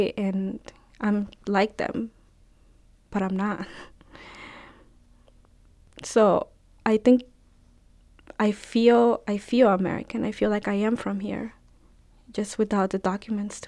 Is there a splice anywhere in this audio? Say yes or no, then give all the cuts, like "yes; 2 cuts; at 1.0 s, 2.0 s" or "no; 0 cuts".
no; 0 cuts